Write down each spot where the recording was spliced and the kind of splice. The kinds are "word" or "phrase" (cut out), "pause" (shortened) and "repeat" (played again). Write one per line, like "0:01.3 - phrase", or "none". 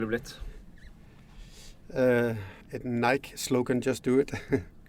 0:02.6 - pause